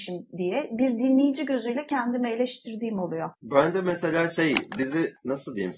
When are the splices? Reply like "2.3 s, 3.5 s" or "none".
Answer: none